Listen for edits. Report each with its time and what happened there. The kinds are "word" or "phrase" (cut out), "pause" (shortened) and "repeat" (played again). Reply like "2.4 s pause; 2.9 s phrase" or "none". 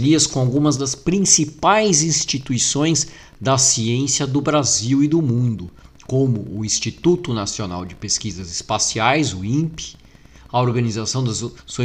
none